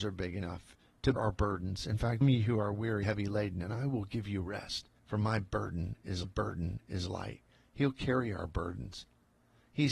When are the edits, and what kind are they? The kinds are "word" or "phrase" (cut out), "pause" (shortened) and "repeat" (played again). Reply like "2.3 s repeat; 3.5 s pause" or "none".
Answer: 1.2 s word; 2.2 s phrase; 3.0 s word; 5.0 s pause; 6.2 s repeat